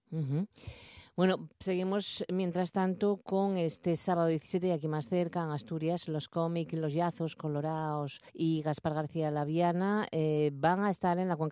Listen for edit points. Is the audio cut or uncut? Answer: cut